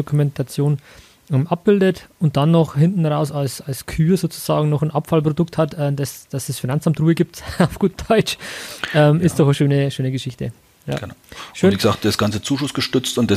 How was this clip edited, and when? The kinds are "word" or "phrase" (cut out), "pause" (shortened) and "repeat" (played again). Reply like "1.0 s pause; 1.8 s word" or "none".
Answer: 2.1 s pause